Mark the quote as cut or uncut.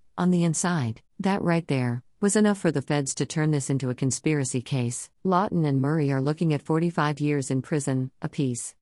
cut